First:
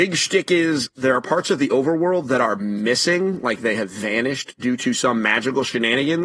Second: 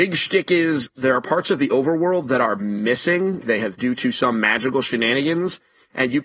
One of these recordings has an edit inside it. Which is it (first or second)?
second